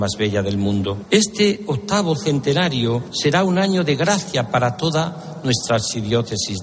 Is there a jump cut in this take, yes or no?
no